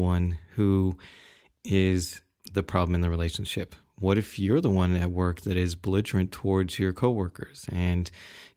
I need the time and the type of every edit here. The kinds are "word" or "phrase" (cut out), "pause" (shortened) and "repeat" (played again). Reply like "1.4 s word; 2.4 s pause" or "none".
none